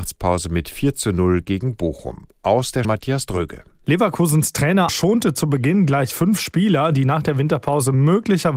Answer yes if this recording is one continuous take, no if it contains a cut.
no